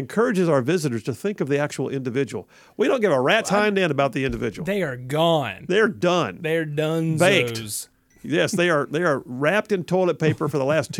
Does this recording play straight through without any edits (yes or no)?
yes